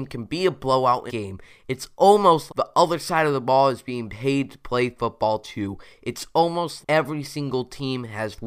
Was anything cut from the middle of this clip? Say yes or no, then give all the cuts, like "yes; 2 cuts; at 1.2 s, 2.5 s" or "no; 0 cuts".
yes; 3 cuts; at 1.1 s, 2.5 s, 6.8 s